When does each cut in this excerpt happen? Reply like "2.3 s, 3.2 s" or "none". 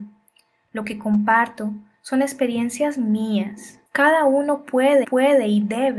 3.9 s, 5.0 s